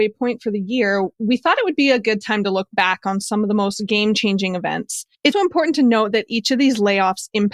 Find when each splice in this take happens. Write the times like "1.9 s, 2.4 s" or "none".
5.3 s